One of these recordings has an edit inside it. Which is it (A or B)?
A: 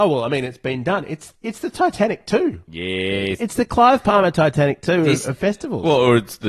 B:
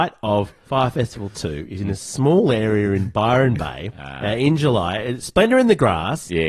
A